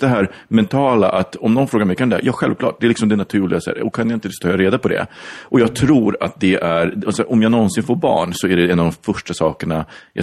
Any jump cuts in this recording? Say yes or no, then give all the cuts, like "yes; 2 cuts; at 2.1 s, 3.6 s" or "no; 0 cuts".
no; 0 cuts